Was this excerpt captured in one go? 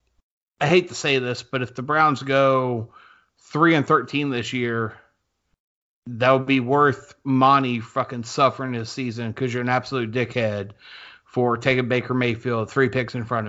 yes; 0 cuts

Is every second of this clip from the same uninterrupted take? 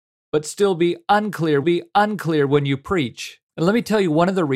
no; 2 cuts; at 1.6 s, 3.5 s

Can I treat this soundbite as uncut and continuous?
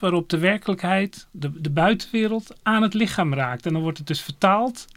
yes; 0 cuts

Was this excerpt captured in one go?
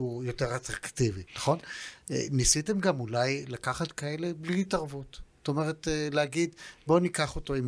no; 1 cut; at 1.3 s

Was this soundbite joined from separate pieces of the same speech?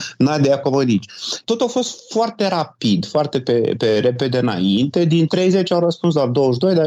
no; 0 cuts

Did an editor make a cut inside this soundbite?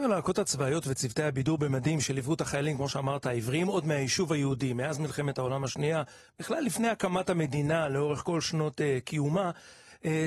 no; 0 cuts

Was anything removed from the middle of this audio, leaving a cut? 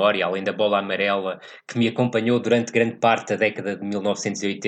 no; 0 cuts

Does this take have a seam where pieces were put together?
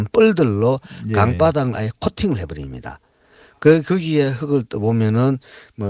no; 0 cuts

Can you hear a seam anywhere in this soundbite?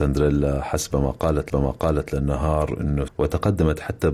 yes; 2 cuts; at 1.5 s, 3.1 s

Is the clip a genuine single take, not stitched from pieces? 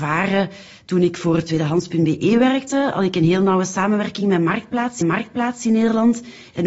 no; 1 cut; at 5.0 s

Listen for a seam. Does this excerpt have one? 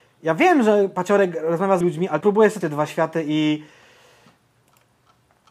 yes; 3 cuts; at 1.8 s, 2.2 s, 2.6 s

